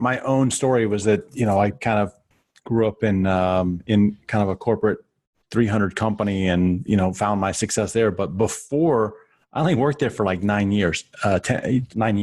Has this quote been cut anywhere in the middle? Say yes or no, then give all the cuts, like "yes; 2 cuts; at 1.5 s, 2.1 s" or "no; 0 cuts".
no; 0 cuts